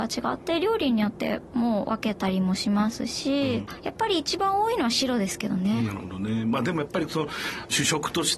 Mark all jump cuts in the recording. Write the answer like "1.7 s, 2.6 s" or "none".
3.7 s

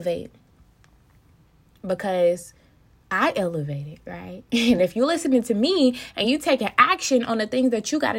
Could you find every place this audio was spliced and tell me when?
none

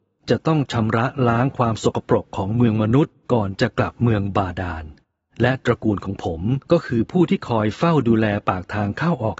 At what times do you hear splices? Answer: 3.2 s, 6.6 s

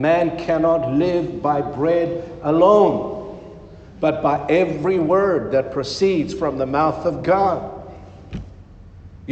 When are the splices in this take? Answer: none

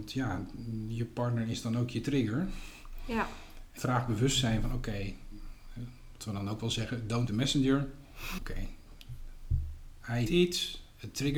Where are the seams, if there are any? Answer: 3.8 s, 6.2 s, 7.3 s, 8.4 s, 10.3 s

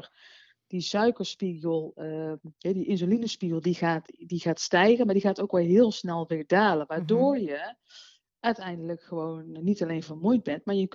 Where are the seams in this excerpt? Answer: 4.1 s

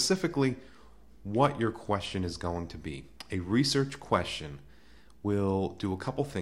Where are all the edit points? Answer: none

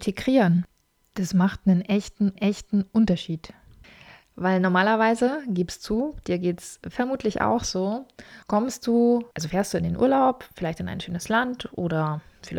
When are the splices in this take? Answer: 2.4 s, 8.4 s, 9.3 s

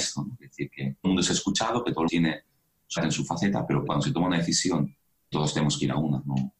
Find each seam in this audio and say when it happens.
1.0 s, 2.1 s, 3.0 s, 3.9 s, 5.3 s

